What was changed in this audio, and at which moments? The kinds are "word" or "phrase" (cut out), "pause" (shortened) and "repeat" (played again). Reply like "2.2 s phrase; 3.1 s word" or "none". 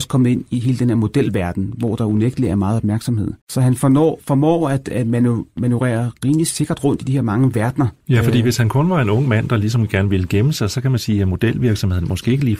3.4 s pause; 8.0 s pause